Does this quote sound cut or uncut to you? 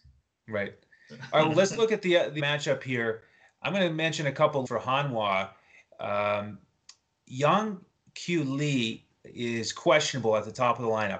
cut